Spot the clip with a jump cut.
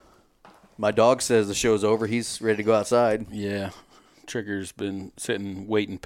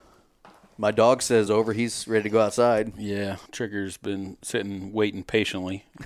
second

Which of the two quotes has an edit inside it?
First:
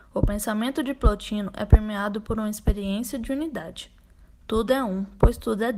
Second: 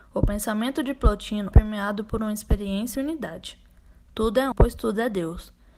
second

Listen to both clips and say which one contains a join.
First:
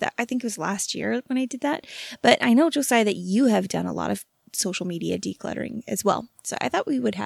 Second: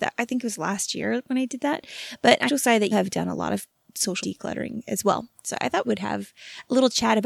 second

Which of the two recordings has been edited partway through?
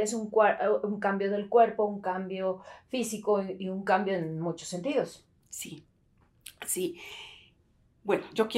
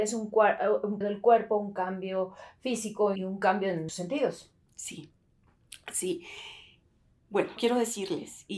second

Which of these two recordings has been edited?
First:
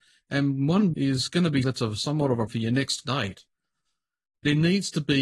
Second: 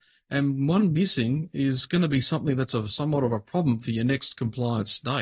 first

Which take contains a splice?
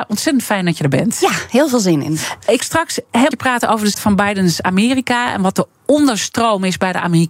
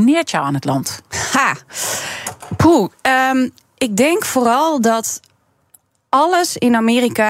first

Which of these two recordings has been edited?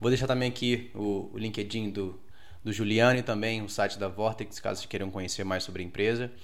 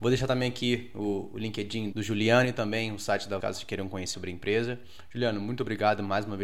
second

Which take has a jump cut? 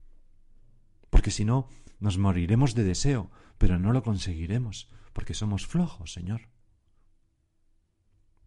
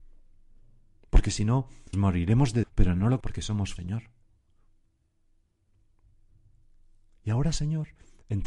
second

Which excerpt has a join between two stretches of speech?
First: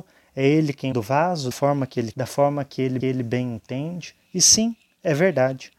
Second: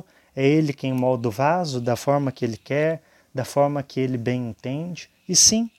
first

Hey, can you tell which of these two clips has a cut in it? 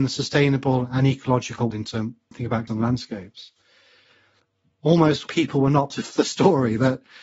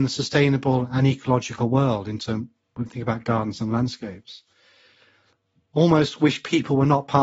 first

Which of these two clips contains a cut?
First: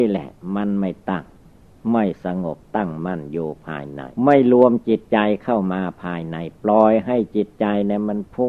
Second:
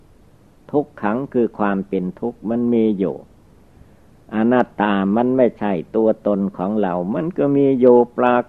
first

